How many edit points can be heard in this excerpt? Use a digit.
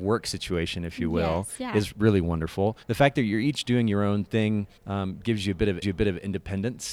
3